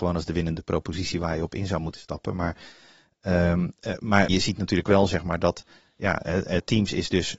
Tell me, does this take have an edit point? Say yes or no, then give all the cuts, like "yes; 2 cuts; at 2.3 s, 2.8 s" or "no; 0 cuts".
yes; 1 cut; at 4.3 s